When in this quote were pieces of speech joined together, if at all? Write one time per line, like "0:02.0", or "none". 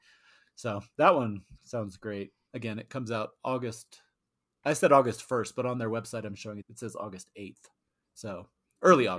0:06.6